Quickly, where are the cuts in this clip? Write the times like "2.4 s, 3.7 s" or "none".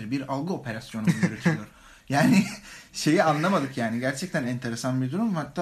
none